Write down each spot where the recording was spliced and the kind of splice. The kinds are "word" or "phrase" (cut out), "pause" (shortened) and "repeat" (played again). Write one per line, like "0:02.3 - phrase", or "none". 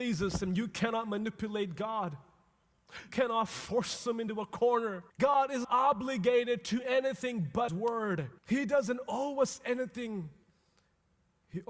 0:03.1 - word
0:05.1 - pause
0:05.6 - word
0:07.7 - word
0:08.4 - pause

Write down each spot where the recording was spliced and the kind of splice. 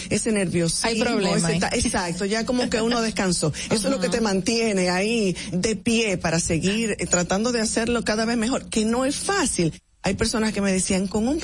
0:05.5 - word

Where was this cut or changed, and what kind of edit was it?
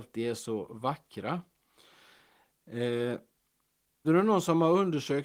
0:04.0 - word

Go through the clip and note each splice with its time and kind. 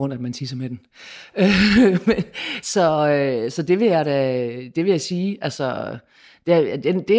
none

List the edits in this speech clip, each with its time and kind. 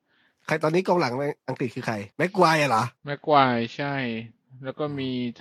0:02.1 - pause
0:03.0 - pause

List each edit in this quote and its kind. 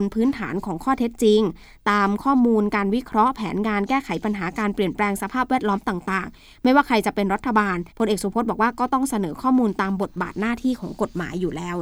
0:07.9 - pause

